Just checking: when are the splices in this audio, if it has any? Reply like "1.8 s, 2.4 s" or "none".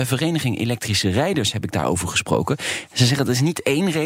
none